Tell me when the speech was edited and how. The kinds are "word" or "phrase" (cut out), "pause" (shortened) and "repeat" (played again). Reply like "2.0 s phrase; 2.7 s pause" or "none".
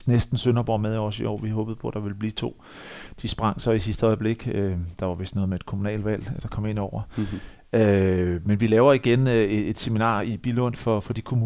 none